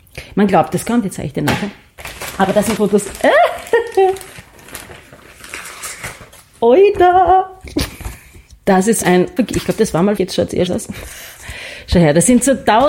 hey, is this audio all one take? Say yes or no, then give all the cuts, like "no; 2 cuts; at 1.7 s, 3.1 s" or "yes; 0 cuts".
no; 5 cuts; at 2.8 s, 9.0 s, 9.4 s, 10.2 s, 10.7 s